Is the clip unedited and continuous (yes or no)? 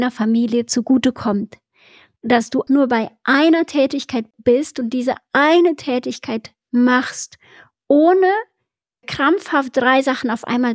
no